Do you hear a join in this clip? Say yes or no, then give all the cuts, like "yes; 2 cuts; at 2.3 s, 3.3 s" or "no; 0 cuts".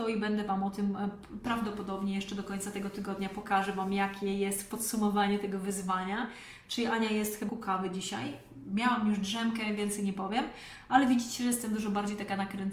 yes; 1 cut; at 7.5 s